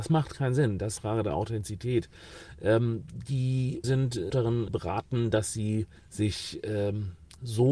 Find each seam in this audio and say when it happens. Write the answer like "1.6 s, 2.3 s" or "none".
1.0 s, 3.8 s, 4.3 s, 4.7 s, 6.0 s